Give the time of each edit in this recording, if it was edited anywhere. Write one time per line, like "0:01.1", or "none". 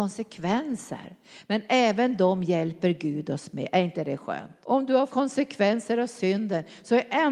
0:04.6
0:05.1